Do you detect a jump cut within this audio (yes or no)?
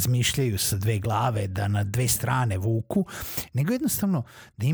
no